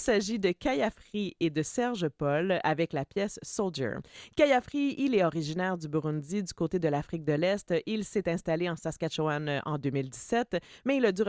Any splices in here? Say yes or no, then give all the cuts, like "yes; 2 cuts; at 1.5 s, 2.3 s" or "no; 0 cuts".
no; 0 cuts